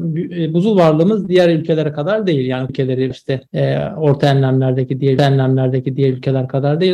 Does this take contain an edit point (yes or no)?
yes